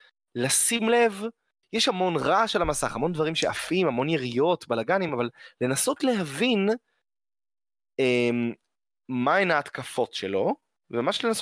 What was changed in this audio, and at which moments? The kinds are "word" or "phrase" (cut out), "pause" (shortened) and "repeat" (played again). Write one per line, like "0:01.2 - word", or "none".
none